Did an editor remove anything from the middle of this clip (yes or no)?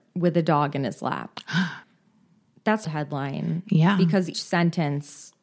yes